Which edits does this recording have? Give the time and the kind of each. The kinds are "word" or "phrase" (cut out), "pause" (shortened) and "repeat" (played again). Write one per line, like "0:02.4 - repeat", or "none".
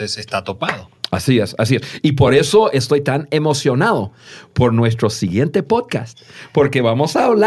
none